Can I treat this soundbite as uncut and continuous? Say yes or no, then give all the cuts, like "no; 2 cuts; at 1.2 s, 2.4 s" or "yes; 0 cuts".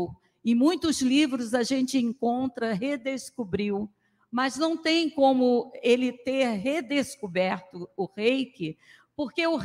yes; 0 cuts